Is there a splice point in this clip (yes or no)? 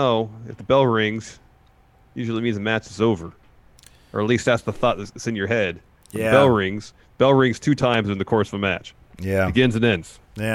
no